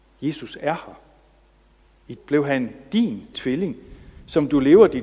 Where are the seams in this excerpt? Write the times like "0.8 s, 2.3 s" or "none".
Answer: 2.2 s, 3.3 s

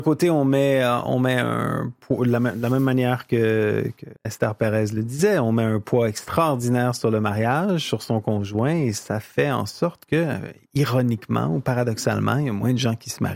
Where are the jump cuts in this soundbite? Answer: 4.2 s

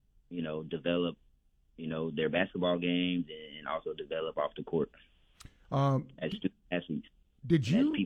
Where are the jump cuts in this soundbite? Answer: none

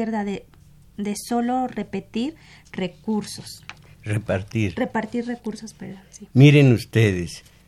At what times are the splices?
none

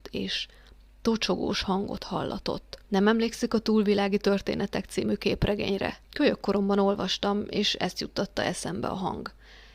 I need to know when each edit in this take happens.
2.8 s, 6.0 s

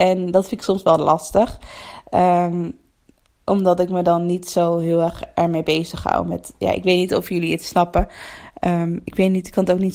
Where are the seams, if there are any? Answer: none

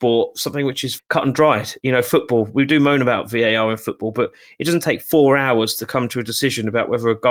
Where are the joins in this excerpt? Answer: 1.0 s

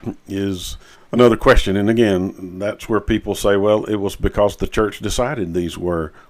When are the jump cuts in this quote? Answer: 0.9 s

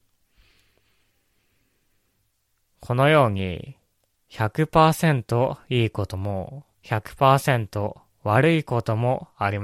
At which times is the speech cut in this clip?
6.7 s

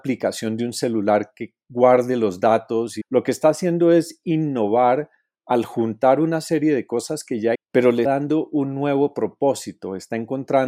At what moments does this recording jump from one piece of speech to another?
3.0 s, 7.5 s, 8.0 s

